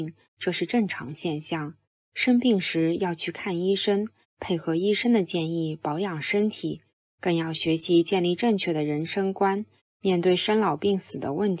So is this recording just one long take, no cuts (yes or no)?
yes